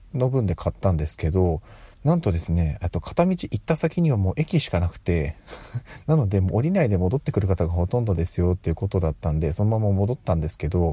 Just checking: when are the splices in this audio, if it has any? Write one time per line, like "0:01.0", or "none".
0:01.9